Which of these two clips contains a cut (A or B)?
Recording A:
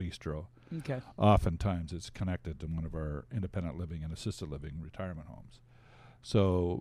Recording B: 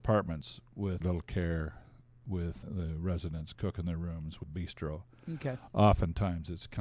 B